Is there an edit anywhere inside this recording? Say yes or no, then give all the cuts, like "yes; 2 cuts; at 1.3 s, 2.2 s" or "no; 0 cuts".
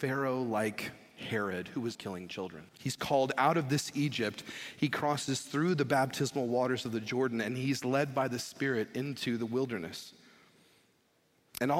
yes; 2 cuts; at 1.9 s, 2.7 s